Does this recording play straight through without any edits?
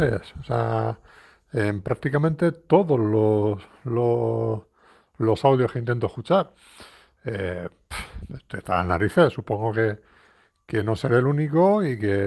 yes; 0 cuts

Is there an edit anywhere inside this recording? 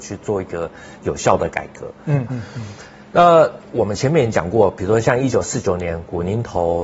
yes; 1 cut; at 2.3 s

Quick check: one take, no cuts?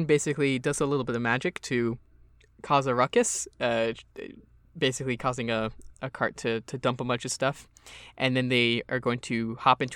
no; 1 cut; at 5.9 s

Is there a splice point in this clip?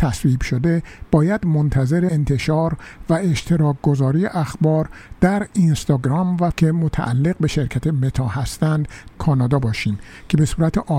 yes; 3 cuts; at 2.1 s, 6.5 s, 9.1 s

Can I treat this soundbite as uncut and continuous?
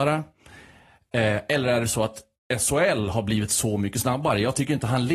yes; 0 cuts

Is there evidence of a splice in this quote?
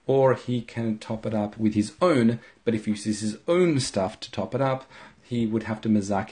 no; 0 cuts

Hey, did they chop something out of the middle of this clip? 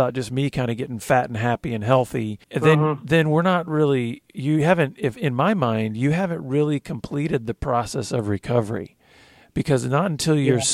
yes; 1 cut; at 2.4 s

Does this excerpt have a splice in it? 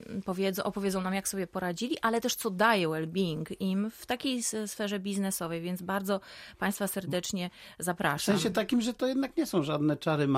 no; 0 cuts

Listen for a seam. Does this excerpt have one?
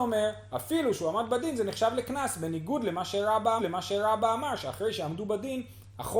yes; 1 cut; at 3.6 s

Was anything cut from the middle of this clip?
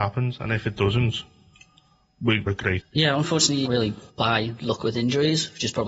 yes; 4 cuts; at 2.5 s, 2.8 s, 3.6 s, 4.1 s

